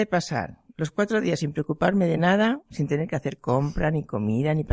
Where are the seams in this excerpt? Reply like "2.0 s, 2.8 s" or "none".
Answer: none

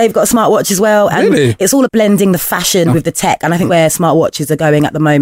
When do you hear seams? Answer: 1.8 s, 2.9 s, 3.7 s

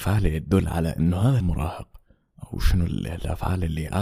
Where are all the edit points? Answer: 1.4 s

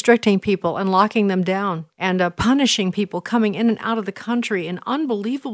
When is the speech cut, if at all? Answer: 1.9 s

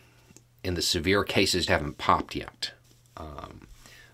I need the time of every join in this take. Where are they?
1.7 s, 2.8 s

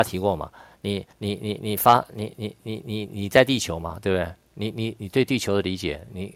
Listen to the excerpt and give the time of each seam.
1.1 s

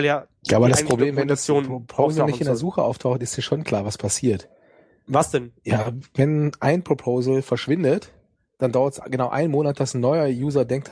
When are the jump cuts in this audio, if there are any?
none

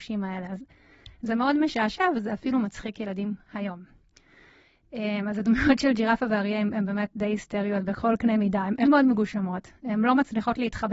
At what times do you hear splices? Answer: 8.8 s

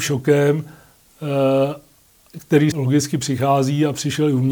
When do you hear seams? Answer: 2.7 s

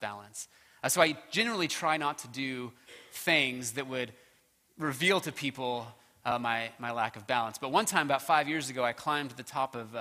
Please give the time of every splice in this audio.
none

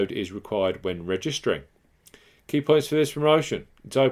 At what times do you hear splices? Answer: none

